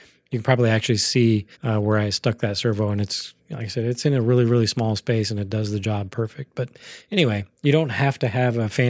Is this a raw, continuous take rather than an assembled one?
no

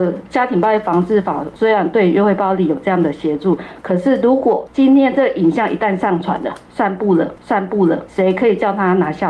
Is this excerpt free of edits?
no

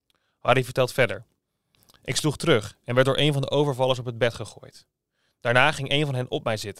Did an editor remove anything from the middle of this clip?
no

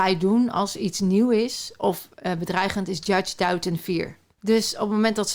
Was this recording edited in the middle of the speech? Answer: no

